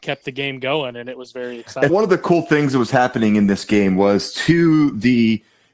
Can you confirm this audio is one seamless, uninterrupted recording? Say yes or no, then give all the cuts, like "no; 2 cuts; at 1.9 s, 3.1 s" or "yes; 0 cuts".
no; 1 cut; at 1.9 s